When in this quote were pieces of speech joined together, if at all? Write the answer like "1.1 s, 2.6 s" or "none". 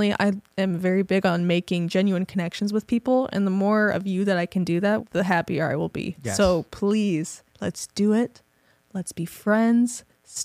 5.0 s, 7.5 s